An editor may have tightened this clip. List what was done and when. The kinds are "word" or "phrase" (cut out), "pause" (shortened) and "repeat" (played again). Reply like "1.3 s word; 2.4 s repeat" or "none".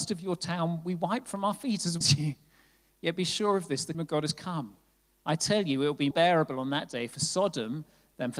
2.0 s word; 3.9 s word; 6.1 s word